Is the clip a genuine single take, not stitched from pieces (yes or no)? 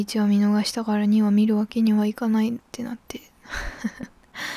yes